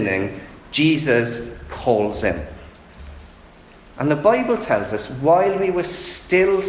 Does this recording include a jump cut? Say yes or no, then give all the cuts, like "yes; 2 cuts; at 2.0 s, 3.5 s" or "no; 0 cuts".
no; 0 cuts